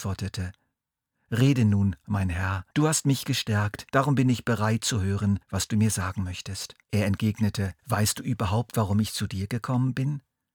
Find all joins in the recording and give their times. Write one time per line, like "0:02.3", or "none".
0:02.7
0:03.9
0:05.4
0:06.8
0:07.8